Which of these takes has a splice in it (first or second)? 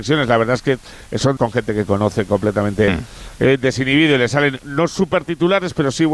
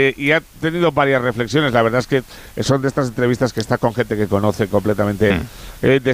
first